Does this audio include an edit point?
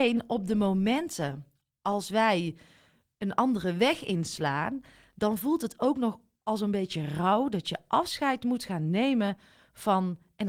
no; 0 cuts

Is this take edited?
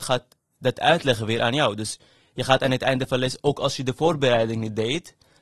no; 0 cuts

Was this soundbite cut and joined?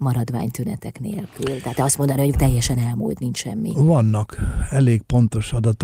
yes; 3 cuts; at 1.7 s, 2.3 s, 3.2 s

